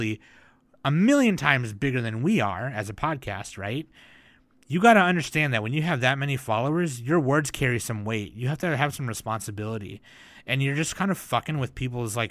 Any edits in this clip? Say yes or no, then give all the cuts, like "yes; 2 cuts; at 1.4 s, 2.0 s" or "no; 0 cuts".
no; 0 cuts